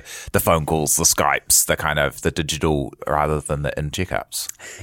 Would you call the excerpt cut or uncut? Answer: cut